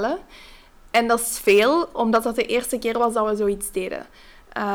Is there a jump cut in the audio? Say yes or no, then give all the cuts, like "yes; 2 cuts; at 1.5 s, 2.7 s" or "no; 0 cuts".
no; 0 cuts